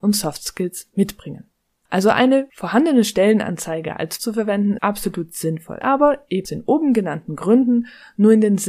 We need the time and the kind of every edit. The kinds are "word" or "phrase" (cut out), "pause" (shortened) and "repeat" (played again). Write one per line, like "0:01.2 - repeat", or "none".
0:04.2 - word
0:04.8 - word
0:05.8 - word
0:06.4 - word